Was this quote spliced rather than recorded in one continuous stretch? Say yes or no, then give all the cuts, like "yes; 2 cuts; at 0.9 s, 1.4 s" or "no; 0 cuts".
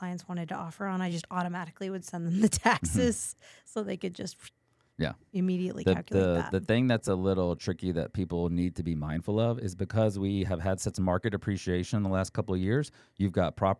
no; 0 cuts